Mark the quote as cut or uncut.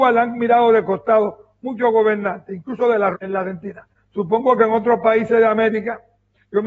cut